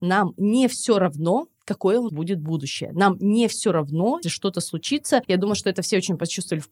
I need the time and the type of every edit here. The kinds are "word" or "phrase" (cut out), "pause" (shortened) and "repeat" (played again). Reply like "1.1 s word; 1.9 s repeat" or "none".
2.1 s word; 4.2 s word